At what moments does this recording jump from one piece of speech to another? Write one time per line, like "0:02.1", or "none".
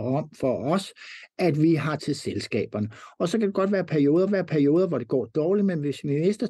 0:02.0
0:04.3